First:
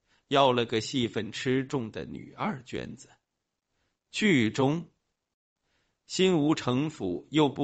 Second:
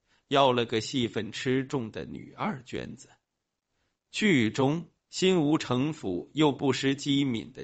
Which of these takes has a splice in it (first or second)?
second